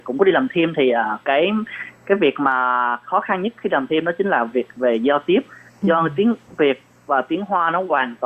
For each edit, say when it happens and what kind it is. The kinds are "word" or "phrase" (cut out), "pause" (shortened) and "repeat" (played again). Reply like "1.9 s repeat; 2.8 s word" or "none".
none